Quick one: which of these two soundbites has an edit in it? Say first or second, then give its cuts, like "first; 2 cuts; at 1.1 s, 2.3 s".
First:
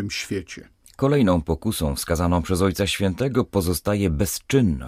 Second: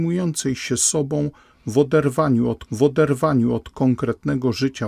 second; 1 cut; at 2.7 s